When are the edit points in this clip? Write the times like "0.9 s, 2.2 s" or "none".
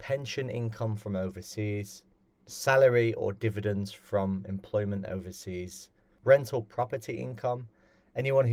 none